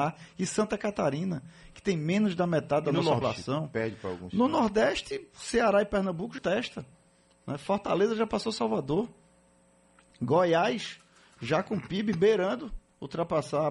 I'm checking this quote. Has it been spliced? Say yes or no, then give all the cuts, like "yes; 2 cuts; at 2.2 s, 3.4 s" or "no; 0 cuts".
yes; 2 cuts; at 3.2 s, 6.4 s